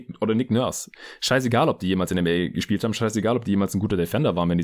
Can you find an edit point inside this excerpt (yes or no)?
no